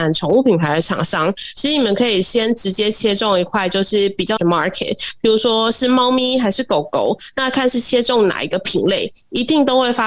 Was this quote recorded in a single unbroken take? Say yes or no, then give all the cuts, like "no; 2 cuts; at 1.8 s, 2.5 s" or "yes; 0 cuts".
no; 1 cut; at 4.4 s